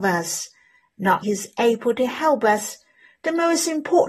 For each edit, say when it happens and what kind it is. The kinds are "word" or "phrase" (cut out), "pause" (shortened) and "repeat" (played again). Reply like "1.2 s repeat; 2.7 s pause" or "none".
1.2 s word

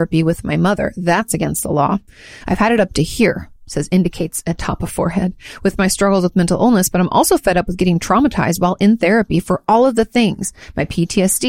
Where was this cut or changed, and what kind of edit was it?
3.6 s pause

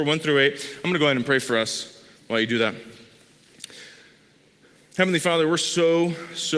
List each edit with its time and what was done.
none

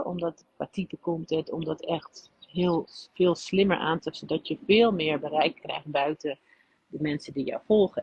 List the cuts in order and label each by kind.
4.1 s word

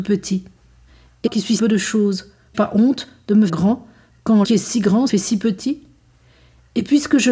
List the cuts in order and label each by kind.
1.3 s word; 1.6 s word; 2.5 s word; 3.5 s word; 4.4 s word; 5.1 s word

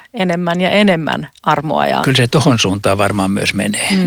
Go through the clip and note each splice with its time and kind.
2.0 s phrase

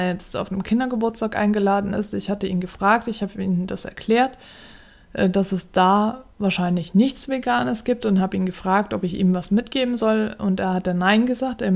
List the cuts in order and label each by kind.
none

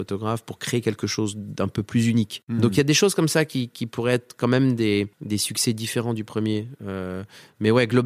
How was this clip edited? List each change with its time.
5.1 s pause

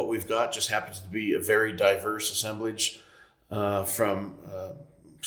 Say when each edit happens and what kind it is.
none

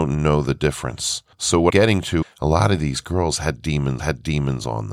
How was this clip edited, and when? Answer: 1.3 s pause; 1.7 s word; 2.2 s word; 4.0 s repeat

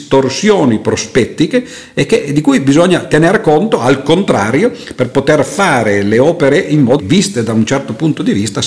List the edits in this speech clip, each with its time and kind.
7.0 s word

